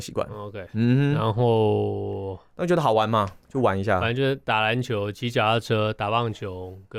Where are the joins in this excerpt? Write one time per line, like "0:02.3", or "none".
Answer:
none